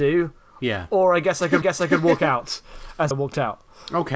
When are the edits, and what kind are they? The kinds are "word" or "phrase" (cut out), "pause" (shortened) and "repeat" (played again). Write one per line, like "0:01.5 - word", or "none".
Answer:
0:01.6 - repeat
0:03.1 - word